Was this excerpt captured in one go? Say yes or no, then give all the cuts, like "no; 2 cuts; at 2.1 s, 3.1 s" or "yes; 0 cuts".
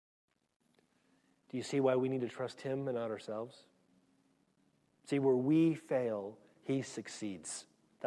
yes; 0 cuts